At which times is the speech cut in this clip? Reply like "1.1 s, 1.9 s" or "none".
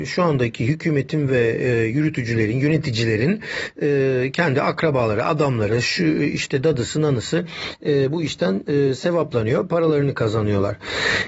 none